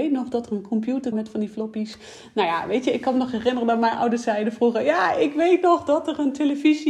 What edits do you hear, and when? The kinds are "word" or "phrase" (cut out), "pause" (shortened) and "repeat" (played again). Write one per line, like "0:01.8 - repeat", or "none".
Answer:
0:01.1 - word